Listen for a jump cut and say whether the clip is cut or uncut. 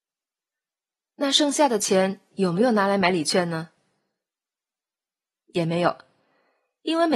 uncut